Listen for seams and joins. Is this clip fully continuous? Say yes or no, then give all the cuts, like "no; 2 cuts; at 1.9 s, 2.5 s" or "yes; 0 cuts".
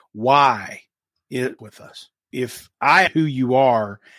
no; 3 cuts; at 1.6 s, 2.3 s, 3.1 s